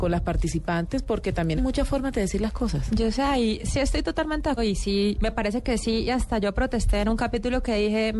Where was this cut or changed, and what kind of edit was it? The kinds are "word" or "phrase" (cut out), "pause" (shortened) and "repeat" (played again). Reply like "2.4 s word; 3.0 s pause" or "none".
1.6 s word; 4.6 s word

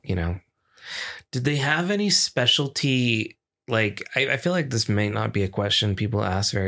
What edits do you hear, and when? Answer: none

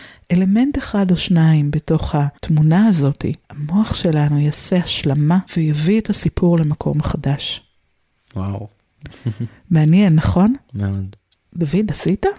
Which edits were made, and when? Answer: 2.4 s pause; 3.4 s pause; 5.5 s pause

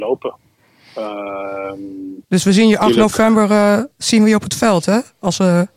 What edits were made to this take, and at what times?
2.2 s pause; 3.9 s pause

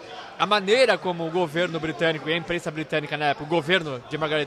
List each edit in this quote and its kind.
none

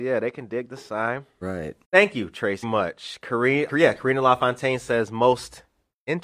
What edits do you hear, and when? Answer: 1.8 s pause; 2.6 s word; 3.7 s word

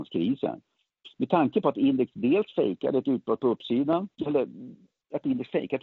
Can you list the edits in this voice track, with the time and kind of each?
4.1 s pause

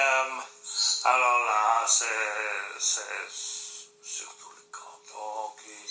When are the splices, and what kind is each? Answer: none

